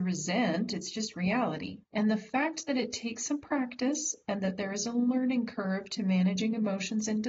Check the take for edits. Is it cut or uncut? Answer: cut